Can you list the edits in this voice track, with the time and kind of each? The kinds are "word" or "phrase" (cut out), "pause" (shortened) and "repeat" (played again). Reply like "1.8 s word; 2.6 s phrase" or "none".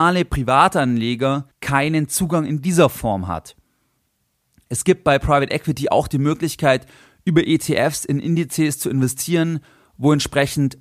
1.5 s pause